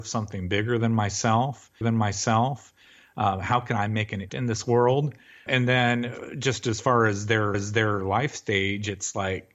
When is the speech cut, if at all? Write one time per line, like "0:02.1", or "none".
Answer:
0:01.8
0:04.3
0:05.5
0:07.5